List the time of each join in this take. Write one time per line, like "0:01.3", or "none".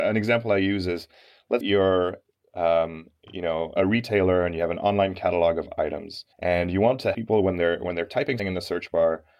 0:01.6
0:03.8
0:06.3
0:07.1
0:08.4